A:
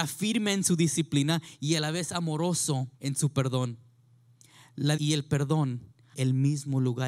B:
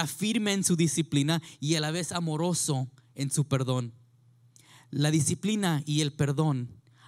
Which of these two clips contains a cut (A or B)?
A